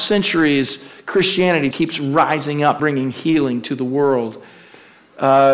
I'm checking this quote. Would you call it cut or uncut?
cut